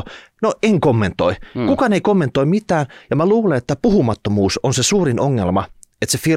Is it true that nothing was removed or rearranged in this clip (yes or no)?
yes